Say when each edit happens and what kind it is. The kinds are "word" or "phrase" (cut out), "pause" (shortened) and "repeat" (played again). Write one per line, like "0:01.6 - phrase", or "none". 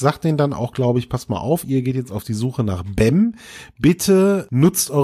none